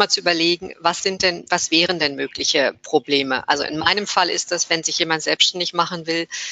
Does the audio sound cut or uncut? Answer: uncut